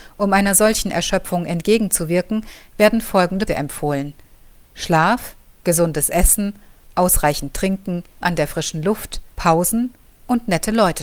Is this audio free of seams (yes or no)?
no